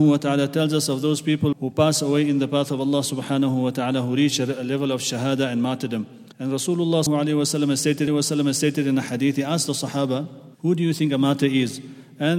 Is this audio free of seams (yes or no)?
no